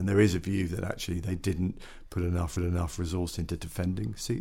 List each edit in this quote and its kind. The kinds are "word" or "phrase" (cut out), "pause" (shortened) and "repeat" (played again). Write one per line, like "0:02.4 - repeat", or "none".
0:02.6 - repeat